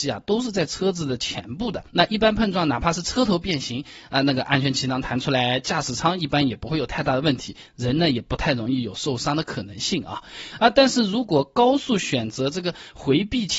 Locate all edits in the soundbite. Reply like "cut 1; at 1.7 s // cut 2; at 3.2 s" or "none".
cut 1; at 1.9 s